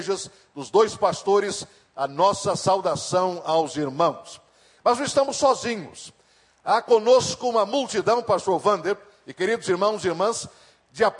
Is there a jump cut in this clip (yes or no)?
no